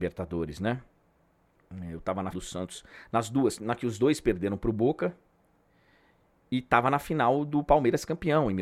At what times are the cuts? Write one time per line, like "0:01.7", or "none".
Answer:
0:02.3
0:03.6